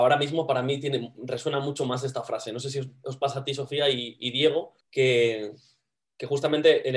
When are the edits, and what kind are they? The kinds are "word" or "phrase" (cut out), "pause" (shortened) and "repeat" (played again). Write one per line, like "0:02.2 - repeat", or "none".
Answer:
0:04.8 - pause